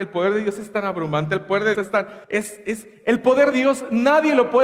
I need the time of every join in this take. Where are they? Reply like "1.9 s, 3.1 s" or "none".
1.7 s, 2.2 s, 3.5 s

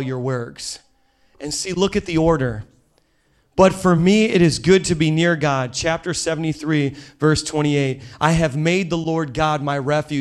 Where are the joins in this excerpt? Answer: none

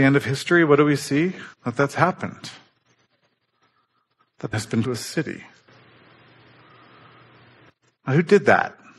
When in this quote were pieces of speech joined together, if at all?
1.5 s, 4.5 s, 4.8 s

